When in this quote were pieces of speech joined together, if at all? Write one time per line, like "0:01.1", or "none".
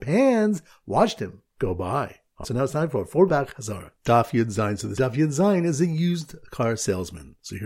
0:01.5
0:02.4
0:03.3
0:05.0